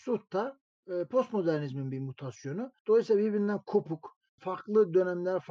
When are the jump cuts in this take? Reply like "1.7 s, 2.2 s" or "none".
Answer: 2.8 s, 4.4 s